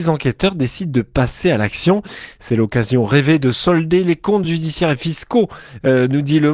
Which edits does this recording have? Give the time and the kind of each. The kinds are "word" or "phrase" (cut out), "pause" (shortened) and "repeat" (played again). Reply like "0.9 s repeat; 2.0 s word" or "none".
none